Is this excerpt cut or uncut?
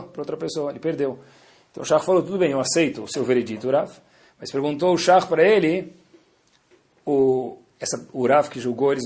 uncut